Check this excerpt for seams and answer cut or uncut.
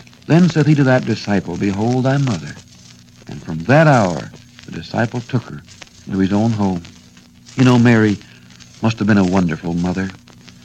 uncut